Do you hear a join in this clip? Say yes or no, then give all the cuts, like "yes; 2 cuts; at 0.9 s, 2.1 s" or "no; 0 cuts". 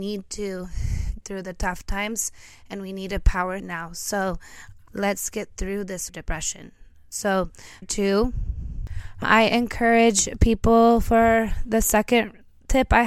yes; 6 cuts; at 1.2 s, 3.6 s, 4.9 s, 6.1 s, 7.8 s, 9.2 s